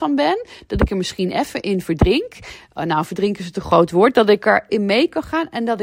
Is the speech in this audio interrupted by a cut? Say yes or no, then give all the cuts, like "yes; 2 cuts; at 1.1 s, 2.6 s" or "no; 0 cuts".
yes; 1 cut; at 4.7 s